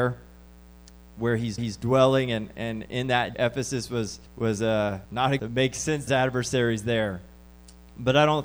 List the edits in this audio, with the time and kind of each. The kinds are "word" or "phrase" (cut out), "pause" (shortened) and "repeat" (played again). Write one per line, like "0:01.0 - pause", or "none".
0:01.6 - repeat
0:03.3 - phrase
0:04.3 - pause
0:05.1 - pause
0:05.4 - phrase
0:06.1 - phrase

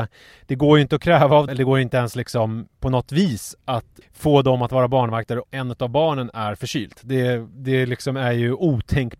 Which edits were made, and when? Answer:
0:01.5 - word
0:04.0 - word
0:05.4 - word

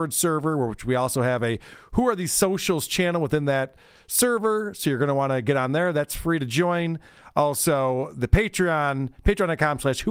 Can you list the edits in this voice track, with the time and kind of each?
none

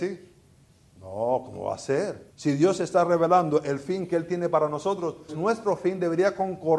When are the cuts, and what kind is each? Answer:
0:02.3 - pause
0:05.3 - word

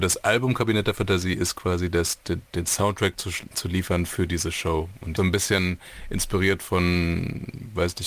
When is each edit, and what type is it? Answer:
0:05.2 - phrase

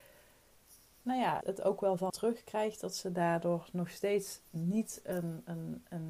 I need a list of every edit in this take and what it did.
0:01.4 - word
0:02.1 - word

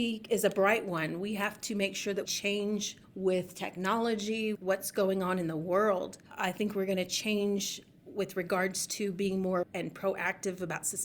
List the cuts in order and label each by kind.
0:02.2 - word
0:04.5 - word
0:09.6 - word

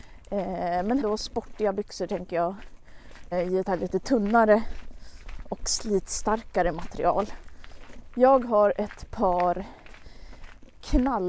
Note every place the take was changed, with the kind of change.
0:01.0 - word
0:03.3 - word
0:03.6 - word

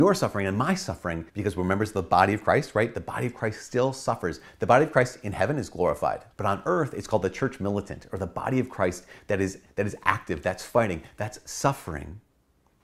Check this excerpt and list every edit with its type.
0:01.3 - pause
0:06.3 - pause

